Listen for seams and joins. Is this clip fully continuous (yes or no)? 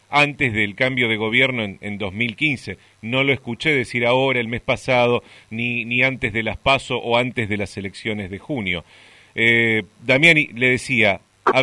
yes